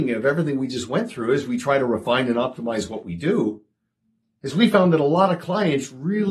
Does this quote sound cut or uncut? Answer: uncut